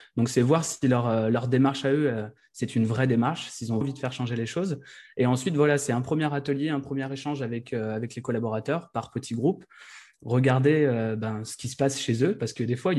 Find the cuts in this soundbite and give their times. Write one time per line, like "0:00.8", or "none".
0:03.8